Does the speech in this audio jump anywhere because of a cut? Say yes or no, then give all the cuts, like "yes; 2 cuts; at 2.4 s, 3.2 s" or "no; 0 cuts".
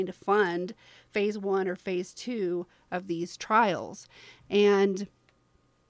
no; 0 cuts